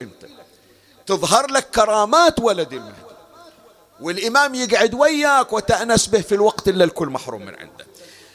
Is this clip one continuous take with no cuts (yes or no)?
yes